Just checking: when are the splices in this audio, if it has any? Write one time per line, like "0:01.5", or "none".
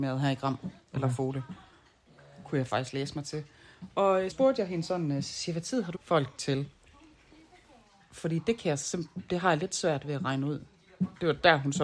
0:04.3
0:05.9